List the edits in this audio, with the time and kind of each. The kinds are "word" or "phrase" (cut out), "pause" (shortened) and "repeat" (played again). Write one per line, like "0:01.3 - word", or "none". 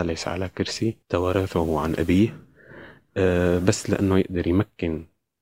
0:01.0 - pause